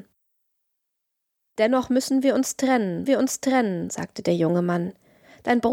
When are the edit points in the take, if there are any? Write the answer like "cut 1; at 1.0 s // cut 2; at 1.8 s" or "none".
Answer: cut 1; at 3.1 s